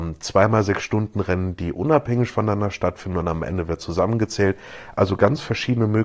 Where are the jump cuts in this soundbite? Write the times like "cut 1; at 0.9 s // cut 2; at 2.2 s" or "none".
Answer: none